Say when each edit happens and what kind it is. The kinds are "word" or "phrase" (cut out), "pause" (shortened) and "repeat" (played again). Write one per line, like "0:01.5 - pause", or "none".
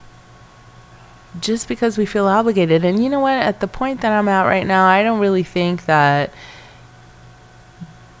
none